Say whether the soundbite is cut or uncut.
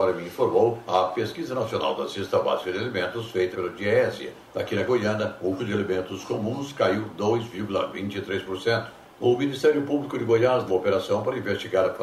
cut